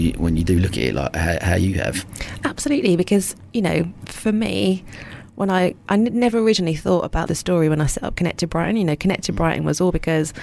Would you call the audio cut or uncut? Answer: cut